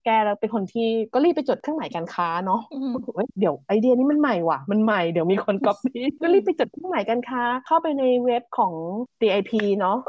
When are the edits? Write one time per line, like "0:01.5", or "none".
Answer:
none

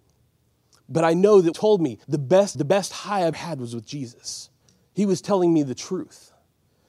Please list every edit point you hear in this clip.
0:01.5
0:02.0
0:02.5
0:03.3
0:04.6

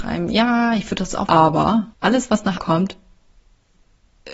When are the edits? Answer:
0:01.3
0:01.9
0:02.6

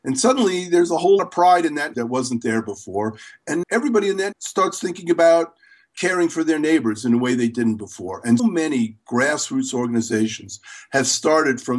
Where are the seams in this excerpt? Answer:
0:01.2
0:01.9
0:03.6
0:04.3
0:08.4

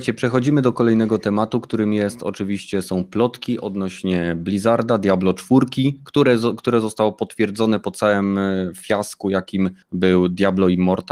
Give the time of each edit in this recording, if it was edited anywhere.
0:09.8

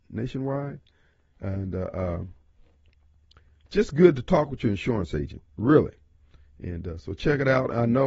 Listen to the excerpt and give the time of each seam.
none

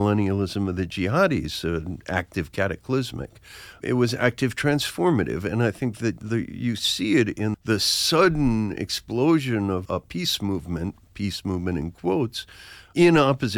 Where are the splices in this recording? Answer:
0:07.5
0:09.8

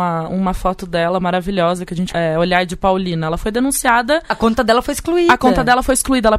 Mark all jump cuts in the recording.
0:02.1

